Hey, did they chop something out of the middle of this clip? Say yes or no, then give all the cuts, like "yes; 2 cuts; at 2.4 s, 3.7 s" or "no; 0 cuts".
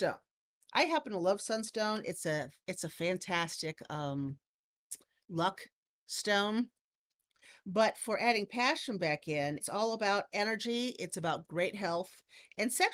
yes; 1 cut; at 9.6 s